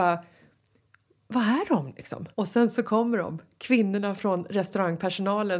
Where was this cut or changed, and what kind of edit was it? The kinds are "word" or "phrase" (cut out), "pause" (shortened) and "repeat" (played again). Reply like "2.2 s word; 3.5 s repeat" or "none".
2.3 s pause